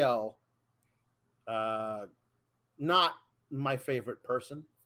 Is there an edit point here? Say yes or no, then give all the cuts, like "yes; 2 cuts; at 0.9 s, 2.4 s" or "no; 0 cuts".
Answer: yes; 1 cut; at 1.0 s